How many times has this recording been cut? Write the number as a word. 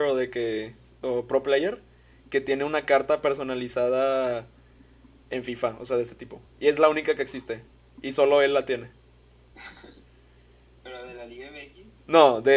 one